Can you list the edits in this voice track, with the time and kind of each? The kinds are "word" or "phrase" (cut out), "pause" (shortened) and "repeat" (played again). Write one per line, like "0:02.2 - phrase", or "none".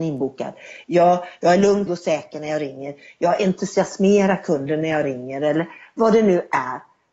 0:01.9 - word